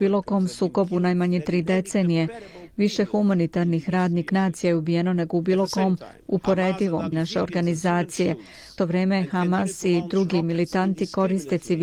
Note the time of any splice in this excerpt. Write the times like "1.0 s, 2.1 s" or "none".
4.3 s, 7.1 s, 8.8 s